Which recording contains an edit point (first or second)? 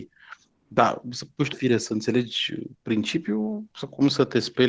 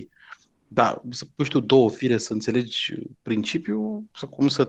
first